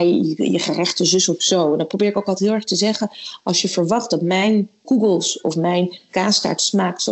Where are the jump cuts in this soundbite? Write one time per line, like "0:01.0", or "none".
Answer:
0:04.8